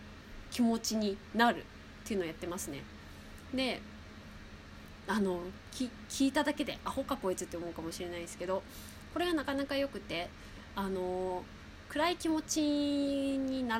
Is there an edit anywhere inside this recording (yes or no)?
yes